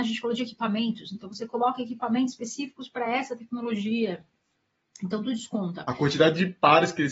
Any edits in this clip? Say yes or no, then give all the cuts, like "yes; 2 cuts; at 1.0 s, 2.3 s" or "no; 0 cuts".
no; 0 cuts